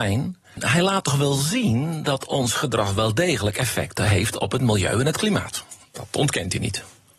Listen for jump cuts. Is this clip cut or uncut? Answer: uncut